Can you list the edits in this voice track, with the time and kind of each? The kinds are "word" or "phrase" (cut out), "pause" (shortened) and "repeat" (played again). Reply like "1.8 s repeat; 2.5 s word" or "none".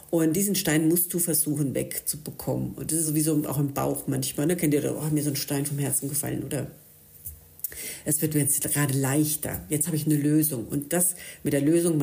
none